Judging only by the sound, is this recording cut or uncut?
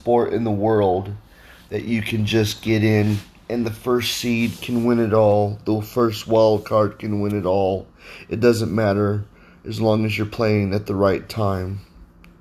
uncut